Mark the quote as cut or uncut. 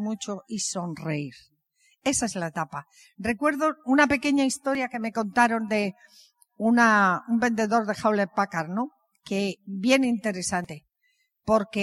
uncut